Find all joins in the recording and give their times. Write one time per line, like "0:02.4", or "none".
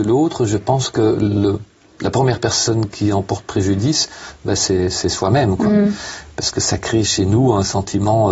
none